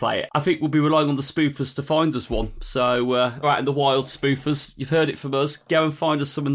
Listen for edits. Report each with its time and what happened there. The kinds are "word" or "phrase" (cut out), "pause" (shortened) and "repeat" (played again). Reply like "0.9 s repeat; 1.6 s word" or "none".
3.4 s phrase